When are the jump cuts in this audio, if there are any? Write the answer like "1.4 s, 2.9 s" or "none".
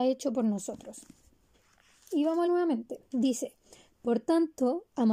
1.5 s, 2.5 s, 3.1 s